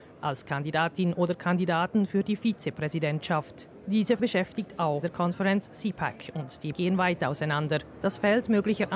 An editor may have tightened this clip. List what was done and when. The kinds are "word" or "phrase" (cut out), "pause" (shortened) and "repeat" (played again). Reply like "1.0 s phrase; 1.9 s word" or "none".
4.2 s word; 5.0 s word; 6.7 s word